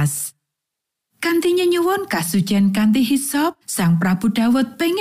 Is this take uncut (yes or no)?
no